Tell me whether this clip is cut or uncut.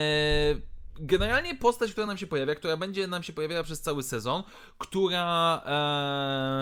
uncut